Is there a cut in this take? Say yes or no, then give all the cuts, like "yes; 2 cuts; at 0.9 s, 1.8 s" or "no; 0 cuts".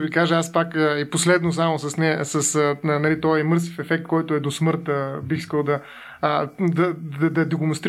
no; 0 cuts